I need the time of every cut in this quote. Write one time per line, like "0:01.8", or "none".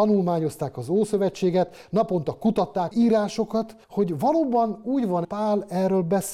0:02.9
0:03.8
0:05.2